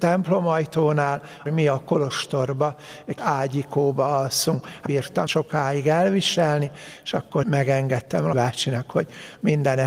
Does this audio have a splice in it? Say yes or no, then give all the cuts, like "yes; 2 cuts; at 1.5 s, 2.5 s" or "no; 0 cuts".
yes; 6 cuts; at 1.5 s, 3.2 s, 4.9 s, 5.3 s, 7.4 s, 8.3 s